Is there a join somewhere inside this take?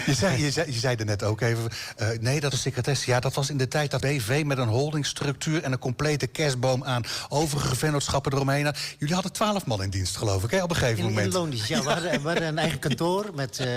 yes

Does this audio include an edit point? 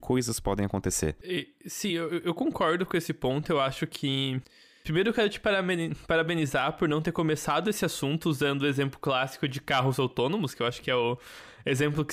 no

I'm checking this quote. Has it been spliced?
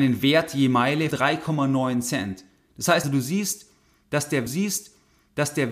yes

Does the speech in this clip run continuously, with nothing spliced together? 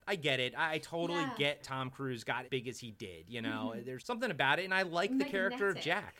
no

